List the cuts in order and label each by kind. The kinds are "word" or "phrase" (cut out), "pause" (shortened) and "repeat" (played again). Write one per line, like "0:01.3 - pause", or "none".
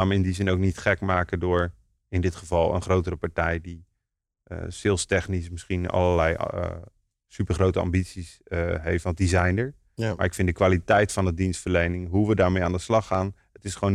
none